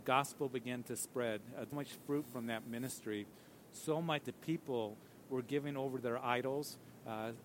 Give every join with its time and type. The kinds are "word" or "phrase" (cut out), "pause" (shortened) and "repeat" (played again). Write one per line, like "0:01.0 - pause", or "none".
0:01.7 - phrase
0:04.2 - phrase